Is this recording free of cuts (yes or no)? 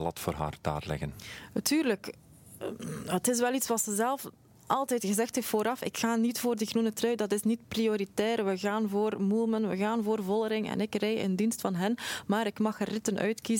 yes